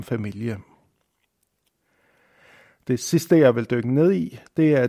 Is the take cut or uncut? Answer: uncut